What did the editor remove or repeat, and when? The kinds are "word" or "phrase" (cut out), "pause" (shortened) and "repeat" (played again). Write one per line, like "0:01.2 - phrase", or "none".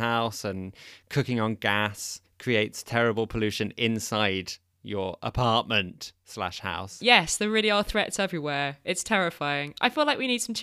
none